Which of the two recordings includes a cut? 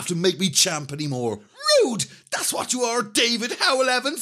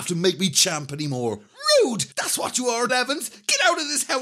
second; 2 cuts; at 2.1 s, 2.9 s

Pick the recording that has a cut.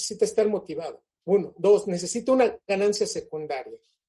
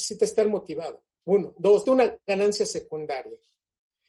second; 1 cut; at 1.8 s

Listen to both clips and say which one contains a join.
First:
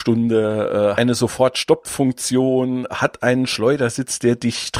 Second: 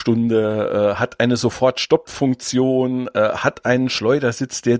first; 2 cuts; at 0.9 s, 2.9 s

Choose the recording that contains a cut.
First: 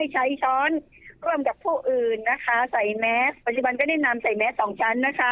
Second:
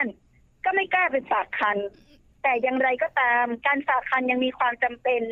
first; 1 cut; at 3.4 s

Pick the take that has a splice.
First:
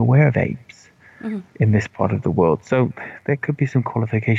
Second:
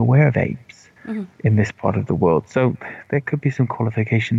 second; 1 cut; at 1.0 s

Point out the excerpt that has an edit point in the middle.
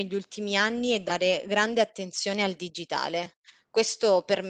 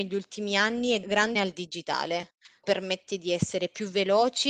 second; 3 cuts; at 1.0 s, 1.3 s, 2.6 s

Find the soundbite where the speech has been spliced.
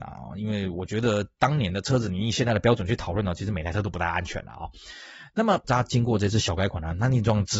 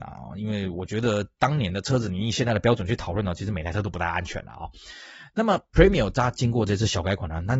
first; 1 cut; at 5.6 s

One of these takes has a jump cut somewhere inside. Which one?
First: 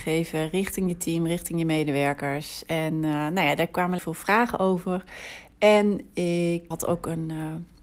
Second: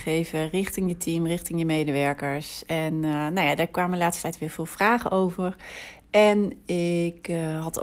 first; 2 cuts; at 4.0 s, 6.7 s

